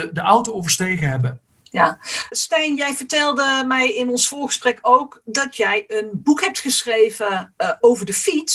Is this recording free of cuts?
no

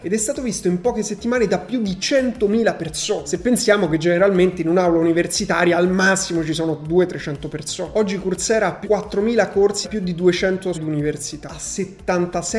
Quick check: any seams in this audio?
yes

